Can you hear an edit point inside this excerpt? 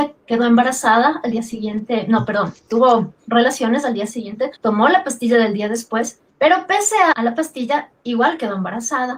yes; 3 cuts; at 4.6 s, 6.3 s, 7.1 s

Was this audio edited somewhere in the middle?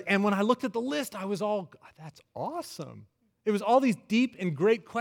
no; 0 cuts

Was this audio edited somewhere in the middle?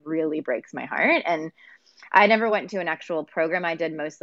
no; 0 cuts

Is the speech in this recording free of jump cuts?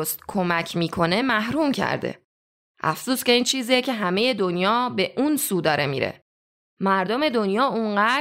yes; 0 cuts

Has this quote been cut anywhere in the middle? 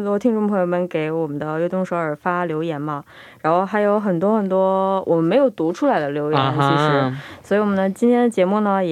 no; 0 cuts

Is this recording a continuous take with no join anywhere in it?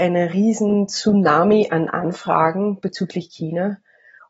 yes; 0 cuts

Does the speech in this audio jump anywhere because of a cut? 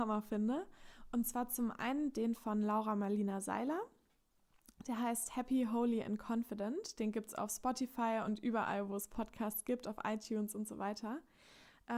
no; 0 cuts

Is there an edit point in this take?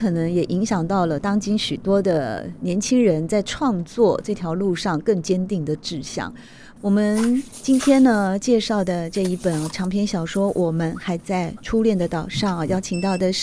no; 0 cuts

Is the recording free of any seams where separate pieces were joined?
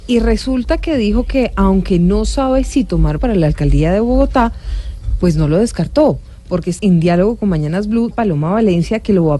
no; 3 cuts; at 3.2 s, 6.8 s, 8.1 s

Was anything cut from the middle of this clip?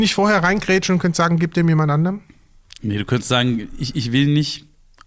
no; 0 cuts

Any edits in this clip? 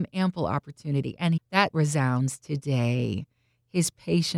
yes; 2 cuts; at 1.4 s, 1.7 s

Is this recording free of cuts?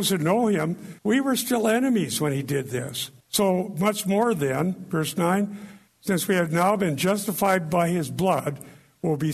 no; 3 cuts; at 1.0 s, 3.2 s, 5.9 s

